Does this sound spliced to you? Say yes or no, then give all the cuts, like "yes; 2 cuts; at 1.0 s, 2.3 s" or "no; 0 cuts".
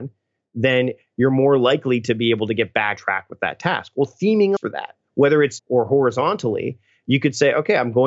yes; 3 cuts; at 3.0 s, 4.6 s, 5.6 s